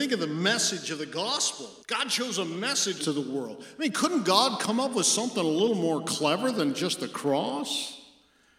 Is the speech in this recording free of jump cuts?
no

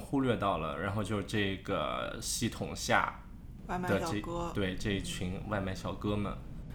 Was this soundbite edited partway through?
no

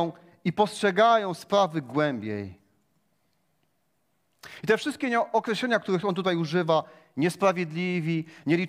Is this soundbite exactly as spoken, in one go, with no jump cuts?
yes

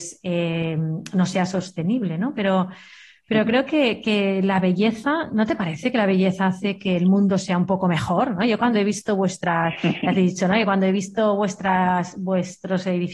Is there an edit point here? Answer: no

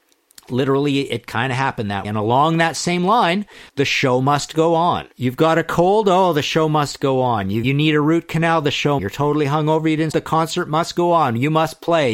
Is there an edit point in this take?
yes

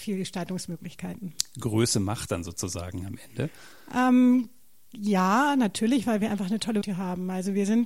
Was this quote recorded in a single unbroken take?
no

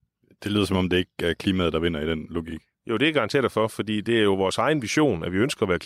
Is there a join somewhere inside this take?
yes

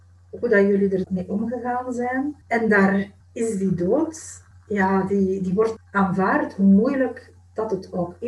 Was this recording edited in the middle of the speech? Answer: yes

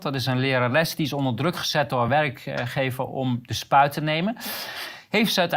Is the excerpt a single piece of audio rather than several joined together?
yes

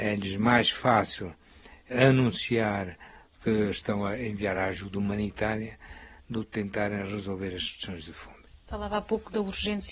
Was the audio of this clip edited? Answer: no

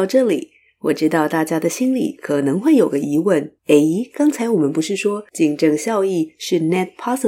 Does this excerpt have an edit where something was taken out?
yes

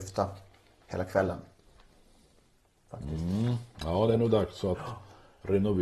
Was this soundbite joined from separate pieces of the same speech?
no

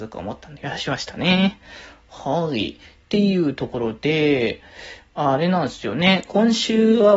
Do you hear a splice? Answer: no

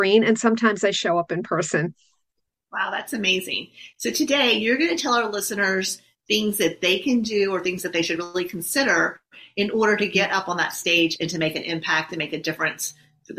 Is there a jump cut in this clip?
no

